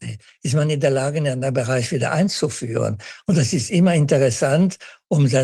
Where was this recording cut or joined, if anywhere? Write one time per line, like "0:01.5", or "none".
none